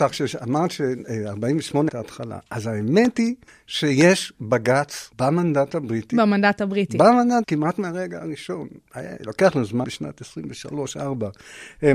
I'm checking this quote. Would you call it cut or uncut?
cut